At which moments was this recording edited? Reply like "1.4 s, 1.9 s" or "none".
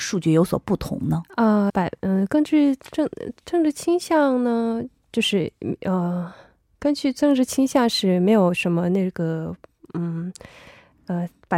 1.7 s